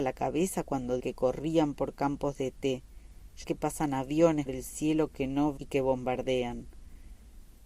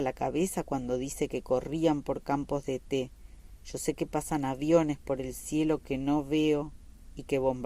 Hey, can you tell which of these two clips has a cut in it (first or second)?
first